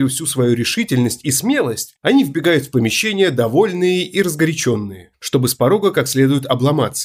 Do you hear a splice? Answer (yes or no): no